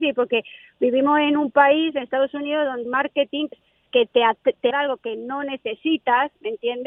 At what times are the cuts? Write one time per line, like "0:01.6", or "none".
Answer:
0:02.9
0:03.5
0:03.9
0:04.7

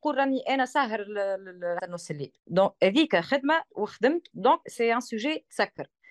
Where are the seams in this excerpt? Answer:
0:01.8
0:02.4
0:03.7
0:04.3
0:04.6

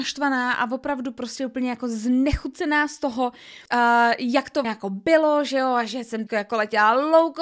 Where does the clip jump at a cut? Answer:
0:03.7
0:04.6
0:06.3

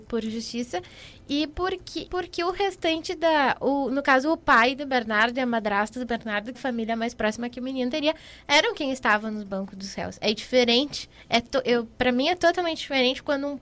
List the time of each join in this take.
0:02.1
0:06.5

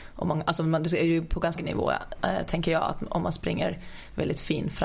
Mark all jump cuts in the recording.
0:01.6

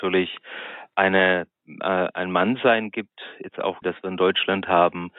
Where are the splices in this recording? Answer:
0:01.6
0:03.8

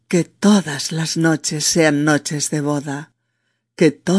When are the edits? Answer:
none

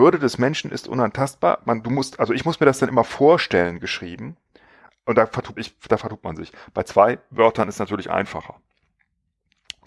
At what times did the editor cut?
0:05.6

